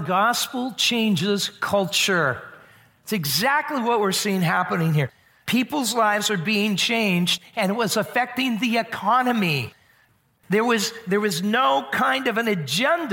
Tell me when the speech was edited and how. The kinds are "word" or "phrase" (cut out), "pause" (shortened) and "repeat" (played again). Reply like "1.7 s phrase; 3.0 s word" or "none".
none